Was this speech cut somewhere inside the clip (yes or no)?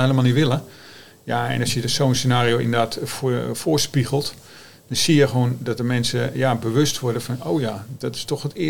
no